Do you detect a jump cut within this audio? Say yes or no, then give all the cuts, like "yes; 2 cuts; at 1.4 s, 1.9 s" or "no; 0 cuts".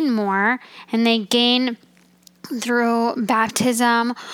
no; 0 cuts